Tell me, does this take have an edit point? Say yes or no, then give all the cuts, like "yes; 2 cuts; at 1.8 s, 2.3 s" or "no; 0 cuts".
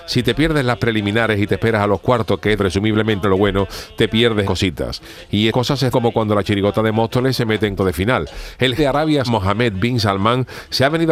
yes; 8 cuts; at 2.6 s, 3.2 s, 4.4 s, 5.5 s, 5.9 s, 7.8 s, 8.8 s, 9.3 s